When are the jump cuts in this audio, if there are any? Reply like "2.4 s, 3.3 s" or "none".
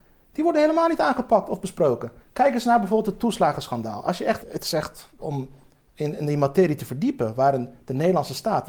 2.2 s, 4.4 s, 5.2 s